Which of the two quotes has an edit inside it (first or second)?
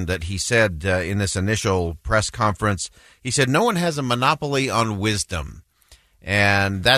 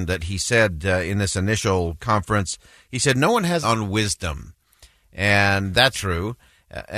second